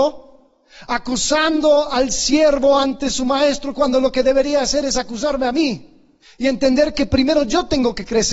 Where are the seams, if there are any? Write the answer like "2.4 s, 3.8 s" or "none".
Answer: 6.2 s